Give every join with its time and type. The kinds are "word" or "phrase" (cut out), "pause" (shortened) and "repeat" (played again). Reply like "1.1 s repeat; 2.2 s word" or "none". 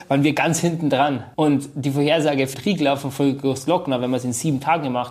1.3 s pause; 2.5 s word